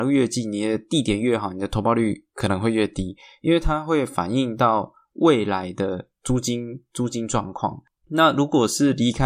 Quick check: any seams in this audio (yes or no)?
no